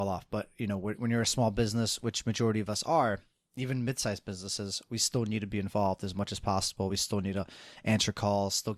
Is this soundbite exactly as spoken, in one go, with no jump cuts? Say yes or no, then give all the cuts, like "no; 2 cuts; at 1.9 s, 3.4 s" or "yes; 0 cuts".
yes; 0 cuts